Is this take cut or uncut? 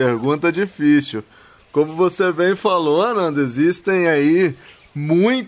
uncut